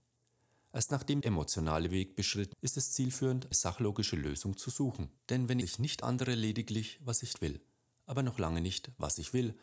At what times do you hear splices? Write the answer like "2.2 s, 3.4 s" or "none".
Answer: 1.2 s, 2.5 s, 3.5 s, 5.2 s, 5.6 s, 6.0 s, 7.3 s